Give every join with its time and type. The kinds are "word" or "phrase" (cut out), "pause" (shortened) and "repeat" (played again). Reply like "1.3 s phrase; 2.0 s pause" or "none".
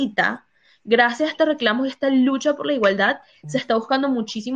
none